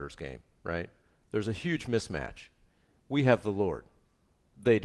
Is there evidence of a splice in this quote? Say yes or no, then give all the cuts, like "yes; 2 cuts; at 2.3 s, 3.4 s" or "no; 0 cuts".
no; 0 cuts